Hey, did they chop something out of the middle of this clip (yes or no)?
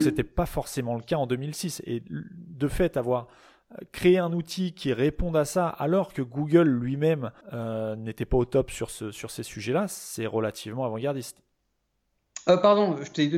yes